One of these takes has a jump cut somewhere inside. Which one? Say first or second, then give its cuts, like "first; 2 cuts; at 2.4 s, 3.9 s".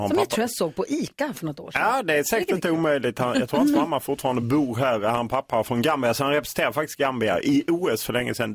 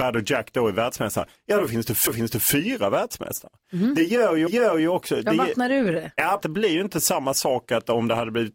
second; 3 cuts; at 2.1 s, 4.5 s, 6.4 s